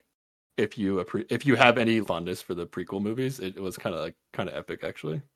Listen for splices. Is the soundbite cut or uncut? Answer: cut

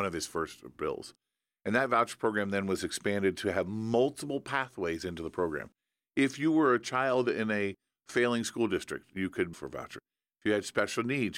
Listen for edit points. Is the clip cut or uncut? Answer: cut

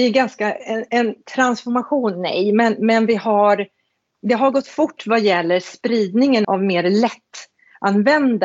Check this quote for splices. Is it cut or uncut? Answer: cut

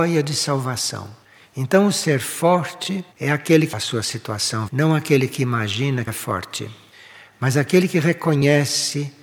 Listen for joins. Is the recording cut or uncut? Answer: cut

